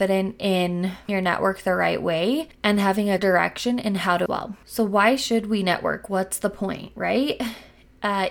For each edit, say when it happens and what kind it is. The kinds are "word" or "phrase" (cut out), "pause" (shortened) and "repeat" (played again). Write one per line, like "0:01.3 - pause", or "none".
0:01.1 - word
0:02.5 - pause
0:03.2 - word
0:04.3 - phrase